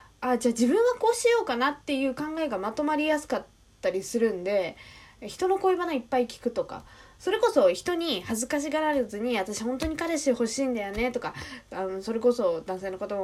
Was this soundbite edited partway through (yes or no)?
no